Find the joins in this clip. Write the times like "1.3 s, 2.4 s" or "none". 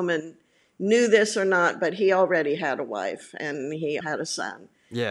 4.0 s